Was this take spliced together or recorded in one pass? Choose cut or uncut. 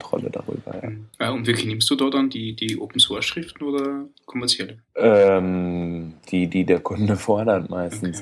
cut